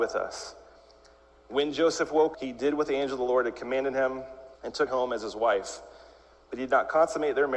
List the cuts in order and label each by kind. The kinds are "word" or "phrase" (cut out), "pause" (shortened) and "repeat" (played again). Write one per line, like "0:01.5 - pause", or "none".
0:02.3 - word
0:04.6 - pause
0:04.9 - word